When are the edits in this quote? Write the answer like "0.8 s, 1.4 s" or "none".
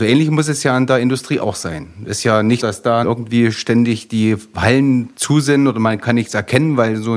2.6 s, 3.0 s, 5.1 s